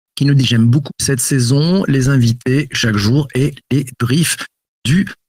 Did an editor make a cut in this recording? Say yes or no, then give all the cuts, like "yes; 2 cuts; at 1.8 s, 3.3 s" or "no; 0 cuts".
no; 0 cuts